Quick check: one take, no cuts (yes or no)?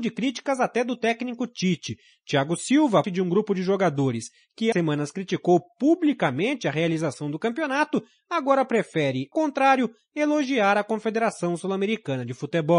no